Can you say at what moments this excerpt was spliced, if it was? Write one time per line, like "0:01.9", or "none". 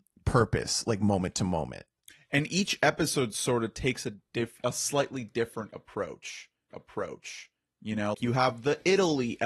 0:06.7
0:08.1